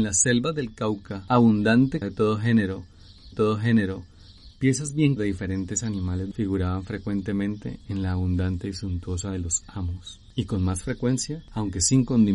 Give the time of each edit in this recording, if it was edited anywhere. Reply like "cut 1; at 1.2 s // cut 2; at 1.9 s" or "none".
cut 1; at 2.0 s // cut 2; at 3.3 s // cut 3; at 5.2 s // cut 4; at 6.3 s // cut 5; at 9.2 s